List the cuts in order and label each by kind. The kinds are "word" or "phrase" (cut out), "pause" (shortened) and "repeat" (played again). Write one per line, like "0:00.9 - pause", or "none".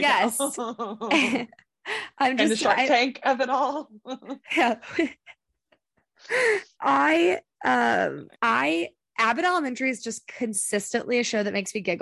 0:08.4 - pause